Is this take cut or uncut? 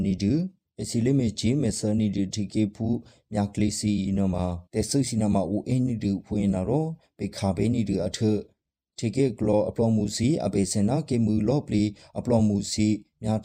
cut